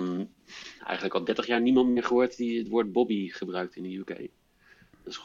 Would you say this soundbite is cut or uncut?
uncut